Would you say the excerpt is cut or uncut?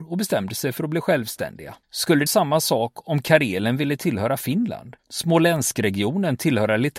cut